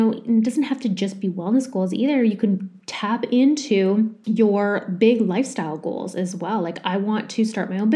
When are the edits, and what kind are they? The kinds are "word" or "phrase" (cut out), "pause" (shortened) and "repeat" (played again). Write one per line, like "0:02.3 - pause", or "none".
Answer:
none